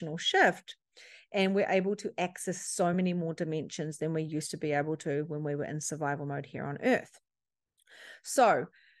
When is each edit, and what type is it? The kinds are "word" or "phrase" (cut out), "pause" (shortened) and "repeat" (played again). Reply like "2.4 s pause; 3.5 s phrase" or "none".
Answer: none